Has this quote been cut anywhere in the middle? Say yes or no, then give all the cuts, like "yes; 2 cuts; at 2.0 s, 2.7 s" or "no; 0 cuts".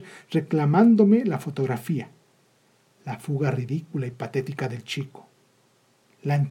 no; 0 cuts